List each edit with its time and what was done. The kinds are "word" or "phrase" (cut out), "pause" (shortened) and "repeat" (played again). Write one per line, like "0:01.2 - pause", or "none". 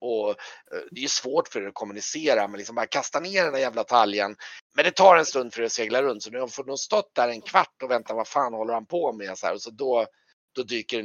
0:04.6 - pause